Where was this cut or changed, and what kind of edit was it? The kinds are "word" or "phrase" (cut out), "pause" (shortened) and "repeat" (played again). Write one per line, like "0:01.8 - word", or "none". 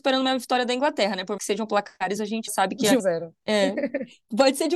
0:01.4 - word
0:02.2 - word
0:02.5 - word
0:03.0 - word